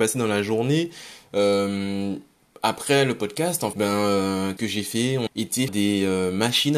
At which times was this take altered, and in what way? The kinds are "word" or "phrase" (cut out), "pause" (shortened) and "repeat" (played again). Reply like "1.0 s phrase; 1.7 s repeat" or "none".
3.7 s word; 4.6 s word; 5.3 s word; 5.7 s word